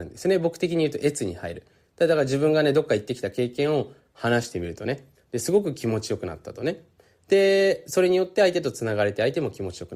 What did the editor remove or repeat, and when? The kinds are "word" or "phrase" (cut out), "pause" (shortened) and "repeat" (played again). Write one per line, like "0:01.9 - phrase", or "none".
none